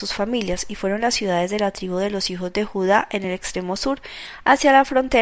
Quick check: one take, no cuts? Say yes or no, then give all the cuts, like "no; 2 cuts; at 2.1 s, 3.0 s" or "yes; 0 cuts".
yes; 0 cuts